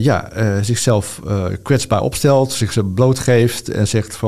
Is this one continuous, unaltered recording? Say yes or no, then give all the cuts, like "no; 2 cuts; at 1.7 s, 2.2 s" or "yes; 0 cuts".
yes; 0 cuts